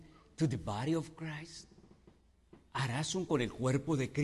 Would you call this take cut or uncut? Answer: cut